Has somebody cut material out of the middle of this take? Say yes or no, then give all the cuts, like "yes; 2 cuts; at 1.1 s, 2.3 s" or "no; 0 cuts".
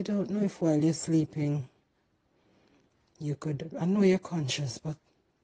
no; 0 cuts